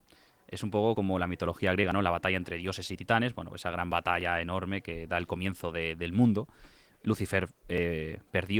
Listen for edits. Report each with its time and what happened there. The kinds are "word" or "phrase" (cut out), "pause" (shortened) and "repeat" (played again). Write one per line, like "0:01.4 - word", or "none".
none